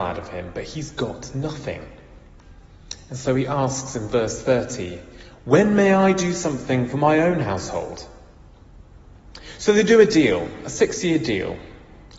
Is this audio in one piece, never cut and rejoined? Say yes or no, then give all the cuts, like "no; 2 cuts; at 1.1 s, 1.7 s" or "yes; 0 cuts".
yes; 0 cuts